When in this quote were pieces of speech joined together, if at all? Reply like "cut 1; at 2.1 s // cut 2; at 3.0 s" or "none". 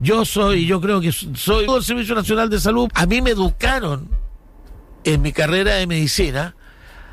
cut 1; at 1.7 s // cut 2; at 2.9 s

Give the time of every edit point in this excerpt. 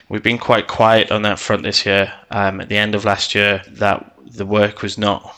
none

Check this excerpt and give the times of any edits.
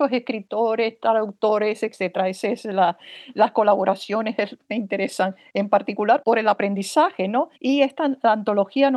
cut 1; at 7.5 s

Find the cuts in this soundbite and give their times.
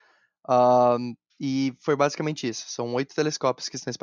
cut 1; at 1.3 s

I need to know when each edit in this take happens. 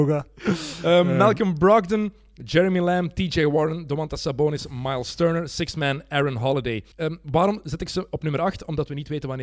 cut 1; at 6.9 s

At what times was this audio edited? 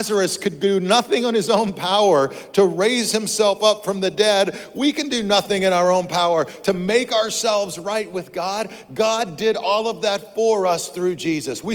none

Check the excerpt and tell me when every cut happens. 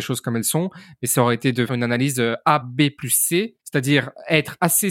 cut 1; at 1.7 s // cut 2; at 2.6 s // cut 3; at 3.6 s

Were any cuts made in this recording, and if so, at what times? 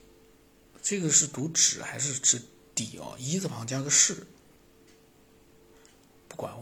cut 1; at 4.6 s

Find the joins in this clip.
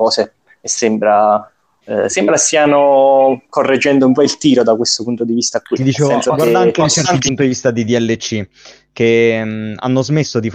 cut 1; at 7.2 s

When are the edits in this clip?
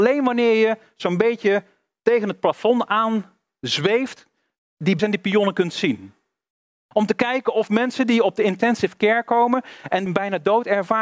cut 1; at 5.0 s // cut 2; at 10.1 s

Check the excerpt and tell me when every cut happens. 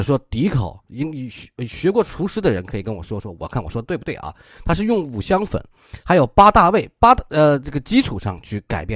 none

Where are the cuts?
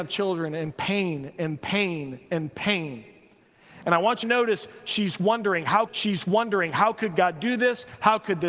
cut 1; at 4.2 s // cut 2; at 5.9 s

